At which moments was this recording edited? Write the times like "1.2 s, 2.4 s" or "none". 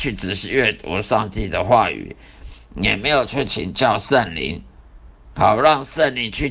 5.3 s